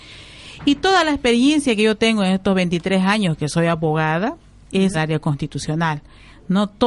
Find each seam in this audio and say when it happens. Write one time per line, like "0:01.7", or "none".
0:04.9